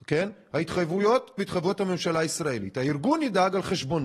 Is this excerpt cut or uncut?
cut